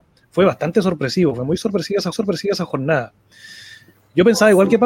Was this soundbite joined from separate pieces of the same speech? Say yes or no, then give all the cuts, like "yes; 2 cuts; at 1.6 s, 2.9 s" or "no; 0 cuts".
yes; 1 cut; at 2.1 s